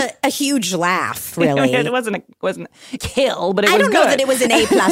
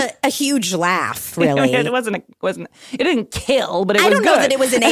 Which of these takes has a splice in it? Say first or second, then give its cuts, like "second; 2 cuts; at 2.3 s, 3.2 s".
first; 1 cut; at 3.0 s